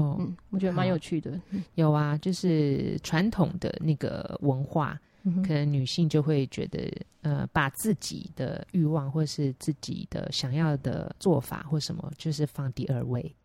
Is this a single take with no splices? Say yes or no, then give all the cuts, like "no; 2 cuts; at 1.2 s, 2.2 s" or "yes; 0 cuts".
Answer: no; 1 cut; at 11.2 s